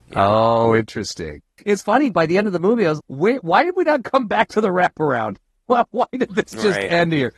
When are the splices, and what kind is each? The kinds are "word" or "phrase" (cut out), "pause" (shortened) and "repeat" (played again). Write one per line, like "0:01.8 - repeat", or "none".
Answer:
0:01.8 - word
0:02.1 - word
0:03.0 - word